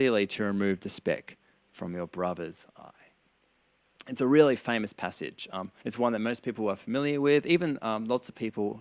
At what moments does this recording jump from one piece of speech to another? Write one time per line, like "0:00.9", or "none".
0:05.8